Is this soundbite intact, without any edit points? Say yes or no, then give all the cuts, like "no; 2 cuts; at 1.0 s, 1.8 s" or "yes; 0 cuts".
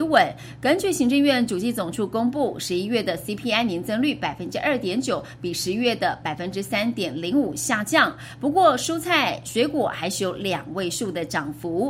yes; 0 cuts